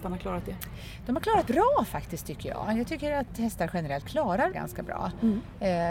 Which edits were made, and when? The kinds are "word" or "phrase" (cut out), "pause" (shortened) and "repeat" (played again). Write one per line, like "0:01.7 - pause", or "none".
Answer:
0:01.5 - word
0:04.0 - word
0:04.5 - word

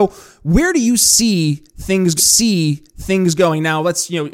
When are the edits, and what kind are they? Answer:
0:02.2 - repeat

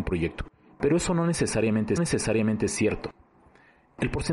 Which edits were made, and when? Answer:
0:02.0 - repeat

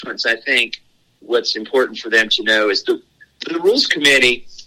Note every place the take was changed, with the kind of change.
none

